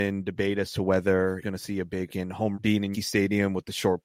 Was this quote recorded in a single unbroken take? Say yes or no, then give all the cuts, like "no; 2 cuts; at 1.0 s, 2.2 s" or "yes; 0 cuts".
no; 4 cuts; at 1.4 s, 2.1 s, 2.5 s, 2.9 s